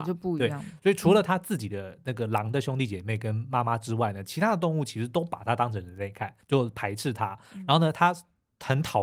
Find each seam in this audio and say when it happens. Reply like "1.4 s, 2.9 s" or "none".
6.4 s